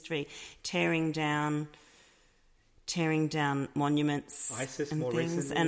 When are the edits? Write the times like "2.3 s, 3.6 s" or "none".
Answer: none

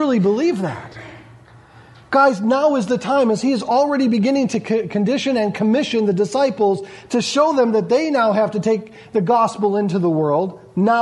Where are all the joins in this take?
none

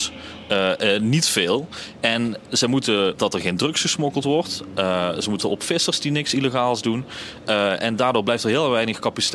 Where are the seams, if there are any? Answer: 3.2 s, 5.4 s

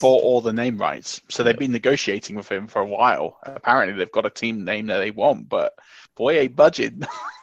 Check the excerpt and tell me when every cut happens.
6.1 s

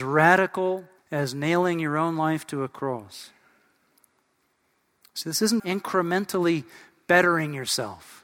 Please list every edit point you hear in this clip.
1.0 s, 5.6 s

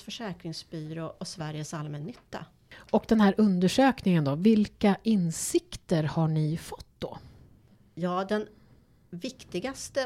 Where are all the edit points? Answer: none

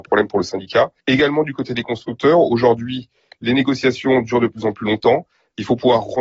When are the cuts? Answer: 1.0 s

